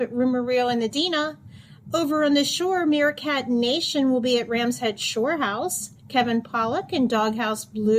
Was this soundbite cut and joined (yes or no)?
no